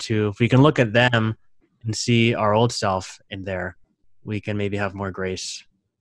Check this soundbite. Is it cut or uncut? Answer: uncut